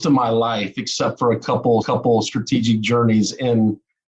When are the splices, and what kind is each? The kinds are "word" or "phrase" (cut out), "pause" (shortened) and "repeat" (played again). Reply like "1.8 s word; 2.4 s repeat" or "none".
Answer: 1.8 s repeat